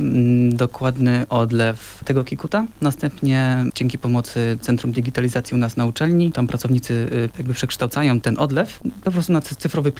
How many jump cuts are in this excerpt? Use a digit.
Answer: 0